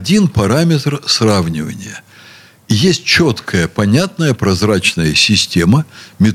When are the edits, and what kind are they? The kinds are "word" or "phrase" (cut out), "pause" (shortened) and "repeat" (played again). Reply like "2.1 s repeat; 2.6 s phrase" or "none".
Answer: none